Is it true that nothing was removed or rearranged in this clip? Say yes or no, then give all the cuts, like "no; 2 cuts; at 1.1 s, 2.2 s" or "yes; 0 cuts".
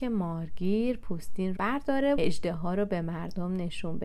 no; 2 cuts; at 1.6 s, 2.2 s